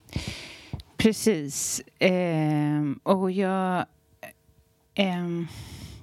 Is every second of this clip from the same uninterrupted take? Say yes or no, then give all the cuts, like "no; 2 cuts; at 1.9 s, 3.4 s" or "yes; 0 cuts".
yes; 0 cuts